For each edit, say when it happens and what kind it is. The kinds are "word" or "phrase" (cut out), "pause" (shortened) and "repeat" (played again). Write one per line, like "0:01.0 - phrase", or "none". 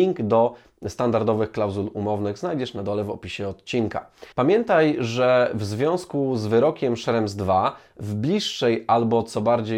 0:04.3 - pause